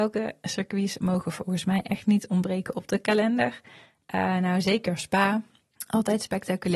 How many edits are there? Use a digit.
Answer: 0